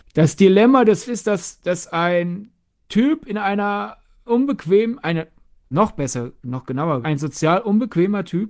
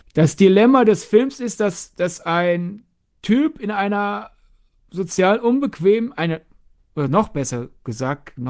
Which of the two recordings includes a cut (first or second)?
first